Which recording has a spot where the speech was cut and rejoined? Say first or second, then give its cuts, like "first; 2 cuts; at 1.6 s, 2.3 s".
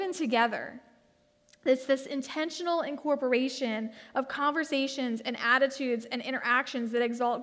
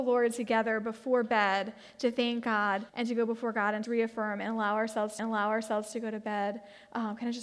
second; 3 cuts; at 2.9 s, 3.8 s, 5.2 s